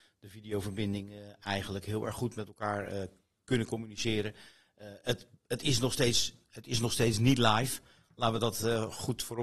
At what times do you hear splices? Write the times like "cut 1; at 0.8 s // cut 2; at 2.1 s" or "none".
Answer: none